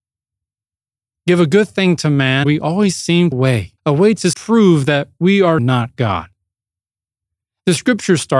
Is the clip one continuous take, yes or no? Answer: no